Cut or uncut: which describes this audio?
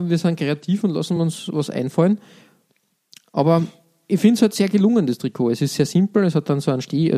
uncut